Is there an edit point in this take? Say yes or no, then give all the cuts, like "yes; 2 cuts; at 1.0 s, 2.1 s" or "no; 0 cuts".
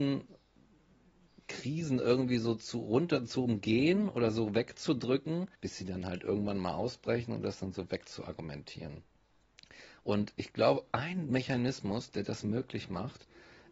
yes; 1 cut; at 5.5 s